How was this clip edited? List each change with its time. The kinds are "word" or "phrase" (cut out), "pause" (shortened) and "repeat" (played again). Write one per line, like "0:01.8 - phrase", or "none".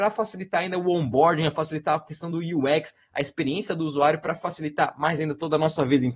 none